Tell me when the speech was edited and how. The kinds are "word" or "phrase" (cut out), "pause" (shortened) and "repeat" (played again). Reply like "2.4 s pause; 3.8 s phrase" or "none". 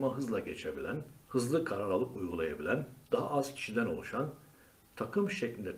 1.2 s pause; 3.0 s pause

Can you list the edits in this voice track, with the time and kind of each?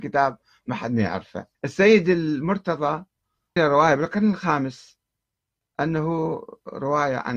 1.5 s pause; 3.6 s word; 5.4 s pause

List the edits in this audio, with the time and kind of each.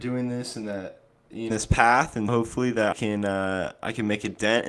1.5 s phrase; 2.3 s word; 2.9 s word

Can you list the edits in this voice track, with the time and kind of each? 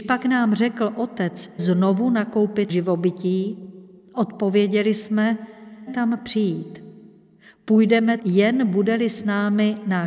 1.6 s word; 2.7 s word; 5.9 s word; 8.2 s word

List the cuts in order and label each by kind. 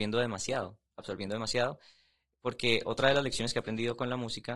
none

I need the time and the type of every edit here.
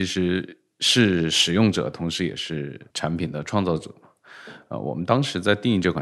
2.9 s pause

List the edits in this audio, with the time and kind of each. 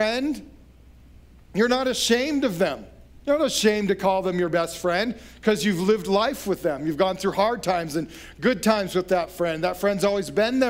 3.2 s pause

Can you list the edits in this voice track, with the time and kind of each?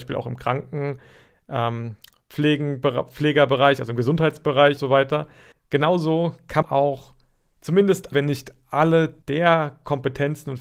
4.8 s word; 5.5 s pause; 6.6 s word; 8.1 s word; 9.2 s pause

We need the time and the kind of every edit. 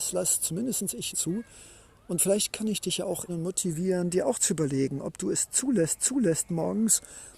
1.1 s phrase; 3.3 s word; 6.0 s repeat

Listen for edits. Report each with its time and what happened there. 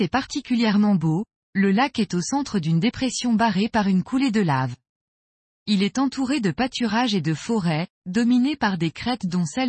none

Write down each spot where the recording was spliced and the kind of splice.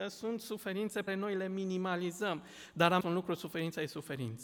1.1 s word; 3.0 s word

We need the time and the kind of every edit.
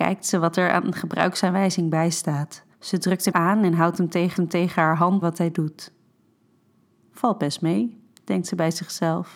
2.7 s pause; 3.3 s word; 4.4 s repeat; 5.2 s phrase

